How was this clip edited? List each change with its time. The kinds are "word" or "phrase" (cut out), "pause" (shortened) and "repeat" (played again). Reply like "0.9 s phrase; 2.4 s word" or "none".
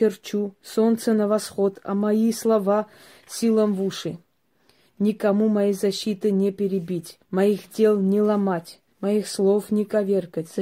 7.2 s pause; 8.9 s pause